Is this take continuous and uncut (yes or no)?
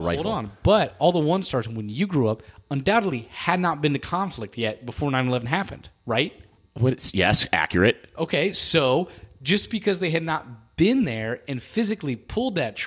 yes